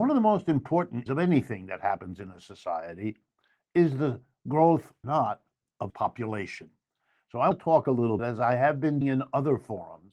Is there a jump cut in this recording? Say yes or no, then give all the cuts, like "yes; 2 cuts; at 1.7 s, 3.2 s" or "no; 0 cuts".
yes; 6 cuts; at 1.1 s, 5.0 s, 5.9 s, 7.5 s, 8.2 s, 9.0 s